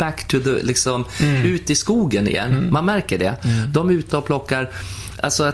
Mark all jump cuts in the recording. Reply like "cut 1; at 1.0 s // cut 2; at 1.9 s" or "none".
cut 1; at 4.1 s